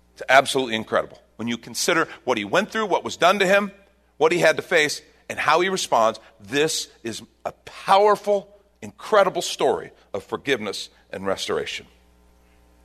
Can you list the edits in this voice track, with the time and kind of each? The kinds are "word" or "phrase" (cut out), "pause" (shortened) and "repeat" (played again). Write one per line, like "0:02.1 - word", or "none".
none